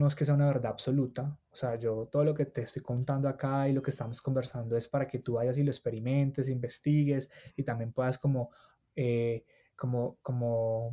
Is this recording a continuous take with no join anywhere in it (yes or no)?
yes